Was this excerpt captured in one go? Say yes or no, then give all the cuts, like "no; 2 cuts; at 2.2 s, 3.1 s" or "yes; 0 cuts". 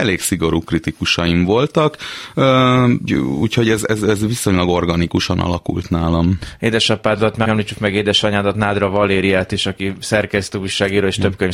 no; 3 cuts; at 3.1 s, 4.0 s, 7.4 s